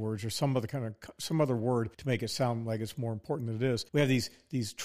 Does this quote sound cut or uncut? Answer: cut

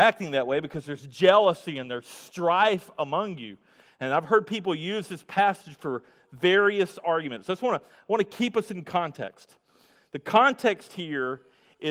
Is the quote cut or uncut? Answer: uncut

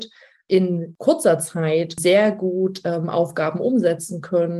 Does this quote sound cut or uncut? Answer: uncut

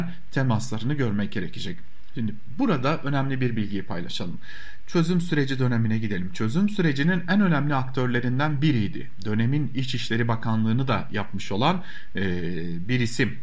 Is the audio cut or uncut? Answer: uncut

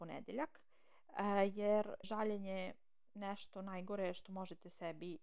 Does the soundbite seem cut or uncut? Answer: cut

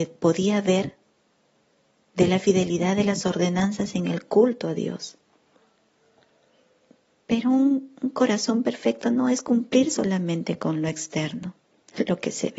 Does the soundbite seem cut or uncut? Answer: uncut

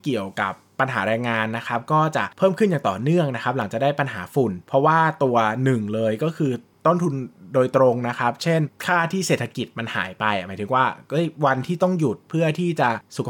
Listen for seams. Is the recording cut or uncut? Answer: uncut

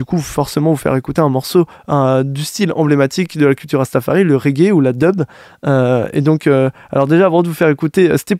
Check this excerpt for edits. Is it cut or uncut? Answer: uncut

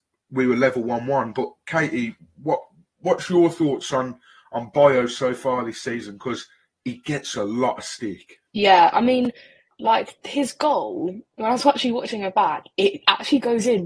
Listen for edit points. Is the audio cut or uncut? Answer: cut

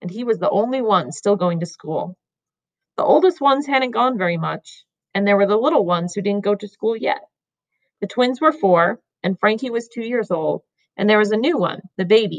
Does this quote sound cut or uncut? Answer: uncut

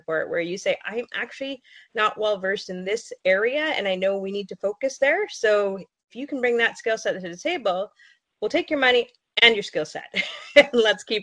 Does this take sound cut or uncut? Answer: uncut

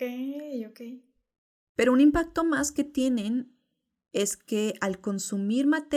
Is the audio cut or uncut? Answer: uncut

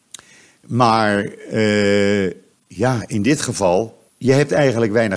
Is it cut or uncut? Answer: cut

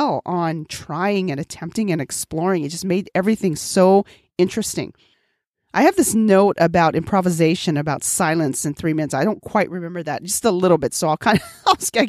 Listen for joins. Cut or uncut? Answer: uncut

